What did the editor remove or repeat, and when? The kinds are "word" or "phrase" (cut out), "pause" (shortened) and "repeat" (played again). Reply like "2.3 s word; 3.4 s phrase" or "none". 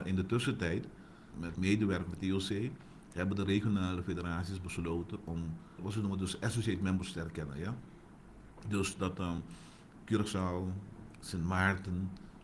none